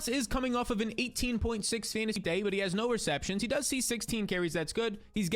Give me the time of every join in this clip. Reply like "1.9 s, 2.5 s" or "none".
2.2 s